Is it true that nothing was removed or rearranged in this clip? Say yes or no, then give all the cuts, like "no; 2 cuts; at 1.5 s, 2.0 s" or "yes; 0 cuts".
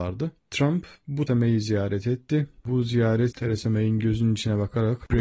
no; 2 cuts; at 1.3 s, 3.3 s